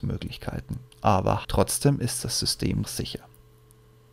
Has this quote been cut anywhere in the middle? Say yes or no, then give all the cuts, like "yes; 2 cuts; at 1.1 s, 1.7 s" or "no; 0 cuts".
yes; 2 cuts; at 1.4 s, 2.8 s